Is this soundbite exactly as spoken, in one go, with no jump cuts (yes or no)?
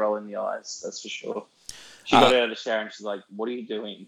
yes